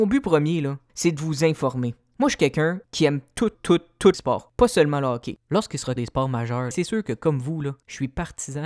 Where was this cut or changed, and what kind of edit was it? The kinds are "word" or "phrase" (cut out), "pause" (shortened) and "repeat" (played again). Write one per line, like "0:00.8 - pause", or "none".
0:03.5 - word
0:04.1 - word
0:06.0 - word
0:06.7 - word